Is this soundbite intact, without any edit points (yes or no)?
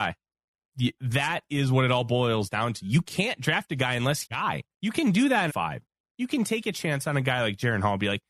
no